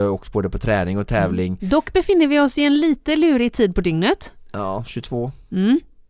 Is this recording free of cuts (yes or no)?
yes